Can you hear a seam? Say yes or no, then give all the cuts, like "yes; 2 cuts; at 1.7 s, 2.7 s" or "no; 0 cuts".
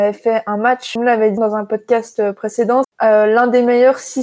yes; 3 cuts; at 1.0 s, 1.4 s, 2.8 s